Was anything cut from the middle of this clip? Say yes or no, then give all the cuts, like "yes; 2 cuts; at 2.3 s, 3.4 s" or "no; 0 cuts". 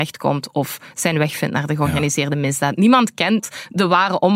no; 0 cuts